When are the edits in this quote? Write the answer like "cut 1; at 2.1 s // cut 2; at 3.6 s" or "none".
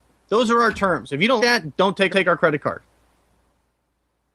cut 1; at 1.4 s // cut 2; at 2.1 s

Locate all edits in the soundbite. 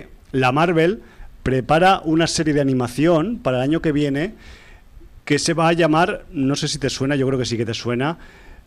cut 1; at 5.2 s

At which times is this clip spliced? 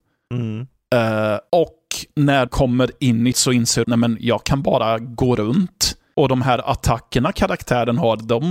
cut 1; at 2.5 s // cut 2; at 3.3 s // cut 3; at 3.8 s

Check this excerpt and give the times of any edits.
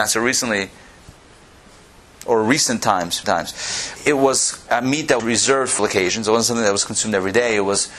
cut 1; at 3.2 s // cut 2; at 4.0 s // cut 3; at 4.7 s // cut 4; at 5.2 s // cut 5; at 5.8 s

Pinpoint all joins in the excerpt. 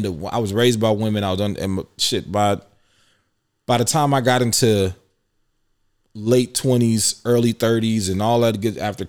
none

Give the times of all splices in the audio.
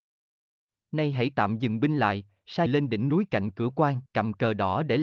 cut 1; at 2.7 s // cut 2; at 4.1 s

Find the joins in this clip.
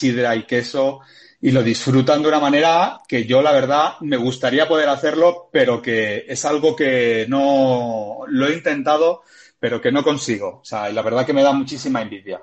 none

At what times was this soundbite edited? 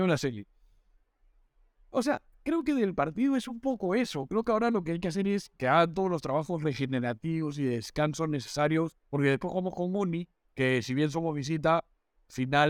cut 1; at 5.6 s // cut 2; at 9.0 s // cut 3; at 10.3 s

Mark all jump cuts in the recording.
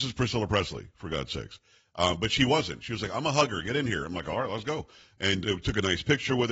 cut 1; at 5.4 s

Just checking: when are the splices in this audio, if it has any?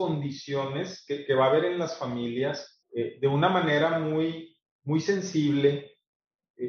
cut 1; at 2.8 s

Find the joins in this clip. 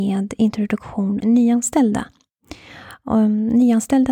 cut 1; at 1.2 s

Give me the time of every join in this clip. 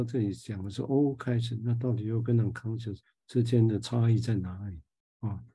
cut 1; at 3.0 s

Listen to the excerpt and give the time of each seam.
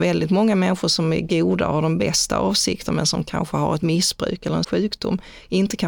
cut 1; at 4.6 s

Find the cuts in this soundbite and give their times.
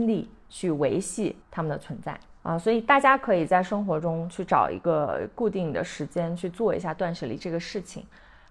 cut 1; at 1.4 s // cut 2; at 2.4 s

